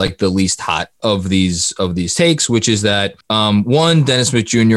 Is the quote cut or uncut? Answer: cut